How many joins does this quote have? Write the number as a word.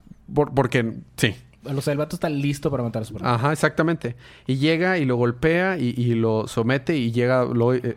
zero